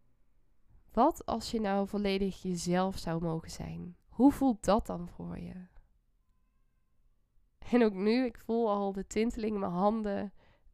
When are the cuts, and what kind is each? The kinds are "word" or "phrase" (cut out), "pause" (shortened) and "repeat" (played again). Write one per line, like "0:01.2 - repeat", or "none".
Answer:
0:04.0 - pause